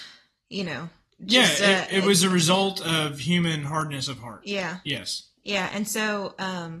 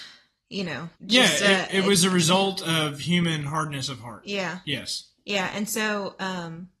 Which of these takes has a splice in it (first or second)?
second